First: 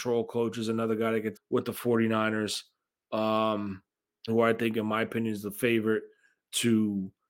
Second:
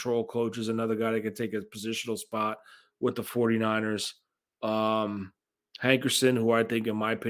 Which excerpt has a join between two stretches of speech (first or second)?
first